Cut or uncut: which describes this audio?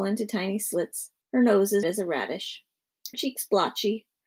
cut